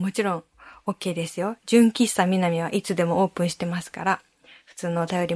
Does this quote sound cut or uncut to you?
uncut